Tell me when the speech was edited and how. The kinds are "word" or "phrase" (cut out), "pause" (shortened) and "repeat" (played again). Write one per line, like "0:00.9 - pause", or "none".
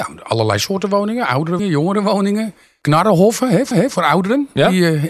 0:01.6 - word
0:03.7 - repeat